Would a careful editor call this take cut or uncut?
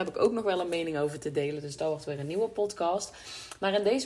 uncut